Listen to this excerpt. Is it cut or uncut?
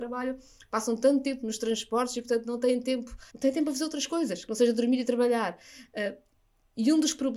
cut